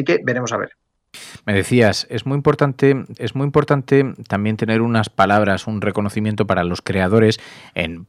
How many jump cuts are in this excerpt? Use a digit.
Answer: 1